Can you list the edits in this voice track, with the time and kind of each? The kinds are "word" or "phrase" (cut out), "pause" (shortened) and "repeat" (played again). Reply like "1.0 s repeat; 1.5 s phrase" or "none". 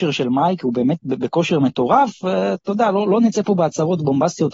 none